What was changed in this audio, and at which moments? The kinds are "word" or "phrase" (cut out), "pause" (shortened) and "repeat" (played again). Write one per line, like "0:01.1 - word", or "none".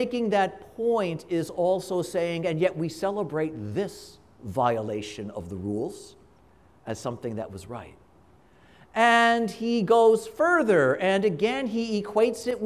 none